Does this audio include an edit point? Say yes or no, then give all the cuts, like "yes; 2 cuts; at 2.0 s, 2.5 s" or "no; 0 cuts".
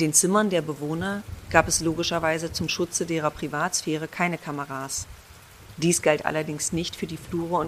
no; 0 cuts